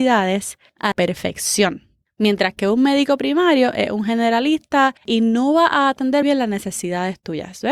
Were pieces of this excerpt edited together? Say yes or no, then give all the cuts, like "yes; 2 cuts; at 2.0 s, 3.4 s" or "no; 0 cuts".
yes; 3 cuts; at 0.9 s, 5.0 s, 6.2 s